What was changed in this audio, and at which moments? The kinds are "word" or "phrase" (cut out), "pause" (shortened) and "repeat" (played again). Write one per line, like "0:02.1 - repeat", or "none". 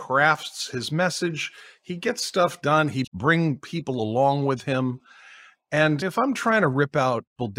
0:03.1 - word
0:06.0 - word